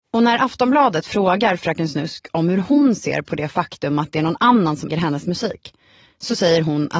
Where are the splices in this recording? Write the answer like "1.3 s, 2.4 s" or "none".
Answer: 4.9 s